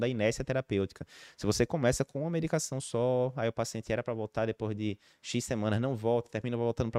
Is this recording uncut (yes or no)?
yes